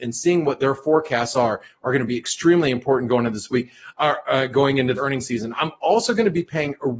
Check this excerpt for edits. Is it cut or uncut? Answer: cut